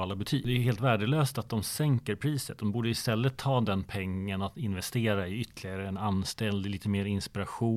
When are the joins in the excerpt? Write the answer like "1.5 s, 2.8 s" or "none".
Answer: none